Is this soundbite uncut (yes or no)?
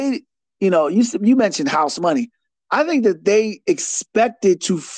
yes